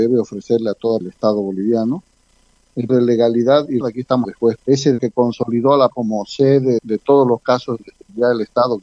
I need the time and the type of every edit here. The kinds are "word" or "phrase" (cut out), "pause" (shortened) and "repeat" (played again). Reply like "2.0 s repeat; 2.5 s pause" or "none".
1.0 s word; 2.9 s word; 3.8 s word; 4.2 s word; 4.6 s word; 5.0 s word; 5.9 s word; 6.8 s word